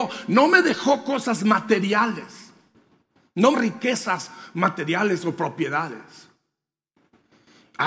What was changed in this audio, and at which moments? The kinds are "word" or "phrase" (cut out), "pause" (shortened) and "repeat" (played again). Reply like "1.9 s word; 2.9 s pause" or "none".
3.5 s word